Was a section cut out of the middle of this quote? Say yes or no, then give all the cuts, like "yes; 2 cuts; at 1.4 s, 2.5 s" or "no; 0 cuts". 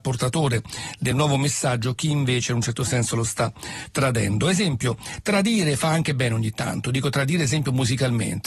no; 0 cuts